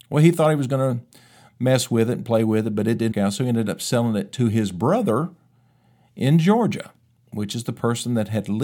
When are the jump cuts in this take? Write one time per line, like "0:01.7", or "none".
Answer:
0:03.1